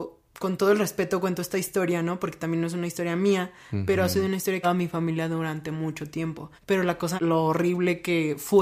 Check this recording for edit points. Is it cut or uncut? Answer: cut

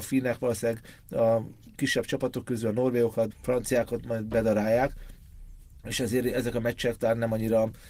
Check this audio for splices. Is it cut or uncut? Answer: cut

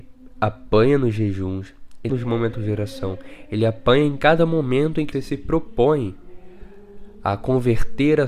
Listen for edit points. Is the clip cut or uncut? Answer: cut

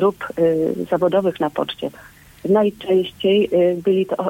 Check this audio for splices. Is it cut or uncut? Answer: uncut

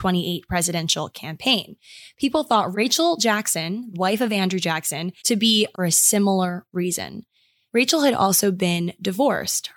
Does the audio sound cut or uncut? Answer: cut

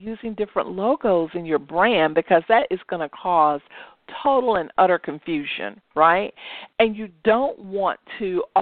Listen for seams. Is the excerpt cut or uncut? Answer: uncut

